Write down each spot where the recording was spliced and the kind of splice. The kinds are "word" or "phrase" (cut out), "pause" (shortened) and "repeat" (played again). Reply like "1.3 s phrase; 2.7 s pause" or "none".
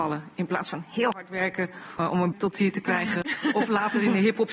2.0 s word; 2.3 s word